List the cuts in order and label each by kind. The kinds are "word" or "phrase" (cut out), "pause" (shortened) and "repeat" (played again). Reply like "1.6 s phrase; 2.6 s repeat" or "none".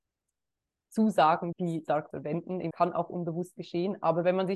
1.5 s word; 2.1 s word; 2.7 s word